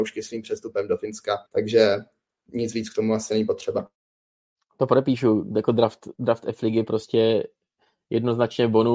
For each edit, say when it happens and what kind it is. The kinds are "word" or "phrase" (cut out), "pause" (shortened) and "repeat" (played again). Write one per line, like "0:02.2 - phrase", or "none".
0:01.5 - pause